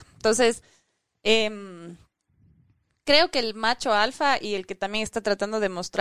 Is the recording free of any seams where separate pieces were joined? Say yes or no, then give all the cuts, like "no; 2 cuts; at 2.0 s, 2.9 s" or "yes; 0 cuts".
yes; 0 cuts